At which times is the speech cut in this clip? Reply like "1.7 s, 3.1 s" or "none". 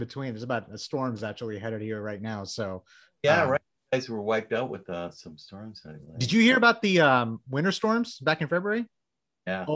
none